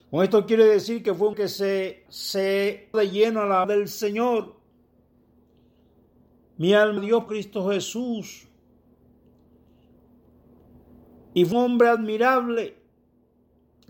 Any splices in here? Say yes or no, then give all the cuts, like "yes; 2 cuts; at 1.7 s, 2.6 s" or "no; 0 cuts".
yes; 7 cuts; at 1.3 s, 2.1 s, 2.9 s, 3.6 s, 7.0 s, 7.3 s, 11.5 s